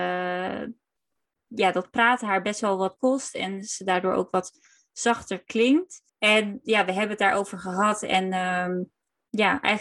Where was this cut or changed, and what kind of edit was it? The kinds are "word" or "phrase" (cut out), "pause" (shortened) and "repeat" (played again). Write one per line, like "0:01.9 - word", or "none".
0:03.0 - word
0:06.1 - pause

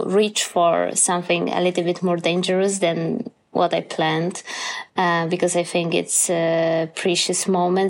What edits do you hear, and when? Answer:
none

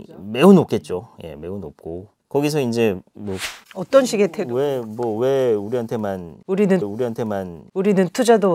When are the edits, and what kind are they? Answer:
0:03.6 - pause
0:06.8 - repeat

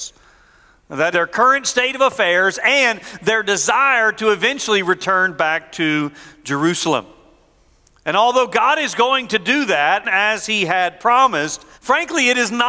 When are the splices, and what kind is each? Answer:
0:01.1 - word
0:10.0 - word
0:11.7 - pause

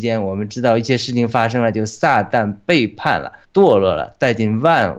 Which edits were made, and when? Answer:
0:03.4 - pause

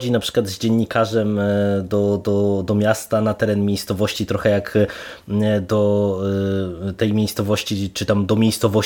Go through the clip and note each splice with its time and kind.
none

